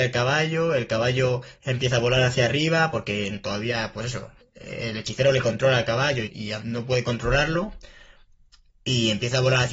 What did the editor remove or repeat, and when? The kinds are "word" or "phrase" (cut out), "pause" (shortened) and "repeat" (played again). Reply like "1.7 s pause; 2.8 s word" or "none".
4.4 s pause; 6.2 s word; 6.6 s word